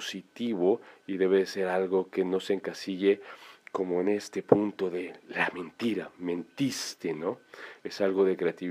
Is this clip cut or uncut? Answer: uncut